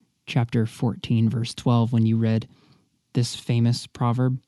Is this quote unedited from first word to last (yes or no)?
yes